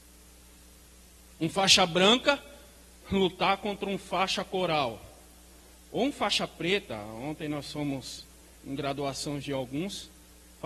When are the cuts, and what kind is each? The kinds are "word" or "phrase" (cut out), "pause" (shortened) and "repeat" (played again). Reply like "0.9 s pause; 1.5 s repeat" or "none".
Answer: 8.5 s pause